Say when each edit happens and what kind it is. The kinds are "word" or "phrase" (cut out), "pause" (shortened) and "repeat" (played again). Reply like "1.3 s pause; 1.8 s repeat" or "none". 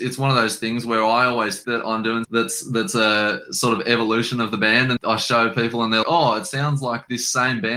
1.6 s word; 2.2 s word; 5.0 s word; 6.0 s word